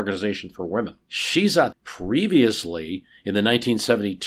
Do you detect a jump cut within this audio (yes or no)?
yes